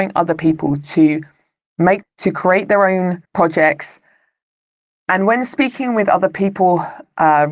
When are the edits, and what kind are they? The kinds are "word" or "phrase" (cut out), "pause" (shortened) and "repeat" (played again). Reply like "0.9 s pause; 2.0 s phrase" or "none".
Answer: 2.0 s word; 3.2 s pause